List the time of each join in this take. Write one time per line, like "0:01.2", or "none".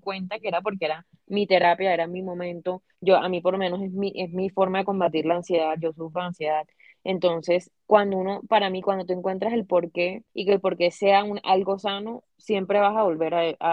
0:02.9
0:07.8
0:10.3
0:12.3